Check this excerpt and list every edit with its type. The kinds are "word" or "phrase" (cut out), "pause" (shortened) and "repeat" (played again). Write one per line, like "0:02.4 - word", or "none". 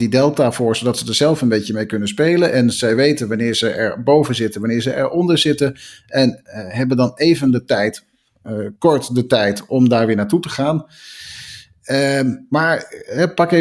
0:08.8 - pause